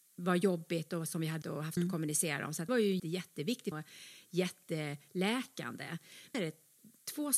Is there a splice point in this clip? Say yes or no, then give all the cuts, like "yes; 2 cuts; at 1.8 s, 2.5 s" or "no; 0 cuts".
yes; 6 cuts; at 1.4 s, 1.8 s, 2.7 s, 3.0 s, 3.7 s, 6.3 s